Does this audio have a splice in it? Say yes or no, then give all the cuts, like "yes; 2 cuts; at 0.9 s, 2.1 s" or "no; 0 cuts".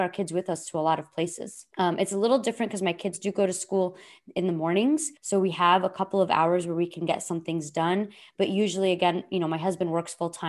yes; 2 cuts; at 1.7 s, 5.2 s